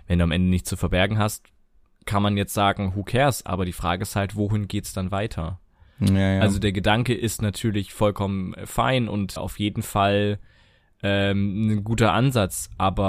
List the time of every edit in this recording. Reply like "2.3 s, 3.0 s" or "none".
9.4 s